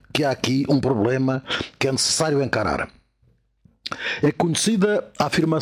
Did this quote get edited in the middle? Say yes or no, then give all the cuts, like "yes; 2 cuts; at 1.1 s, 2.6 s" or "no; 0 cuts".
no; 0 cuts